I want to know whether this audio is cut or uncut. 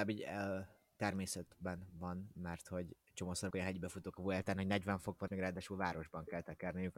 cut